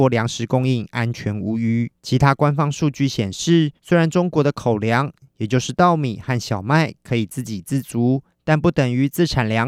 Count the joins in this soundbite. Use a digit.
3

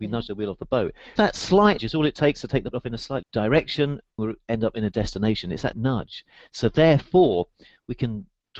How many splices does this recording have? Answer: 7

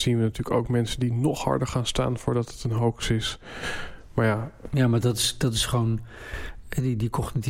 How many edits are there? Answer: 0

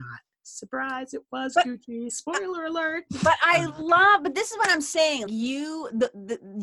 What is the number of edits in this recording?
1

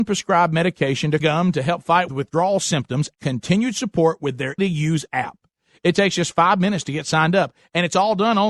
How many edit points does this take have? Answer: 3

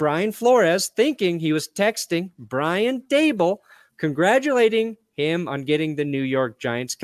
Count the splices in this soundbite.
0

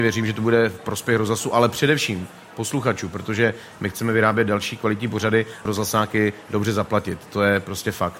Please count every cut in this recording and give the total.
1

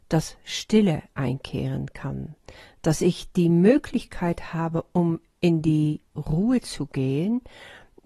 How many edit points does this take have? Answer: 0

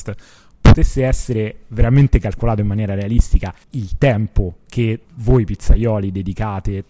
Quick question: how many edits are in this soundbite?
2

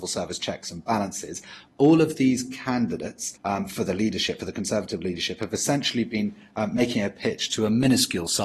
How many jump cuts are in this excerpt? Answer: 1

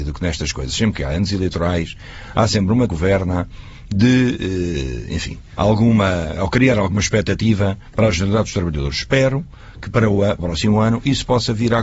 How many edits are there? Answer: 3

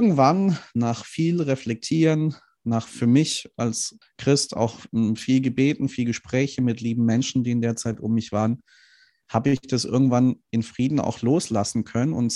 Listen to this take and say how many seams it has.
1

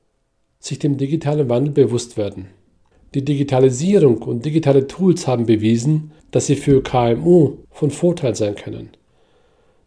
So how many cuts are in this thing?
3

